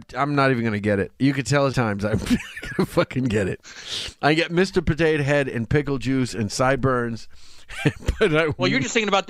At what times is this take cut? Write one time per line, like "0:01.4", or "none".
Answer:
0:01.7